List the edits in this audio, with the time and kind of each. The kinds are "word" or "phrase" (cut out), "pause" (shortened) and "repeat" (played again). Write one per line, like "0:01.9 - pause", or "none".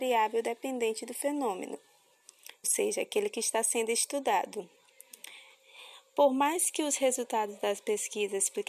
0:02.6 - word